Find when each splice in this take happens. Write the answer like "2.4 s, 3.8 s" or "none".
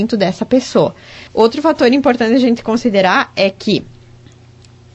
1.3 s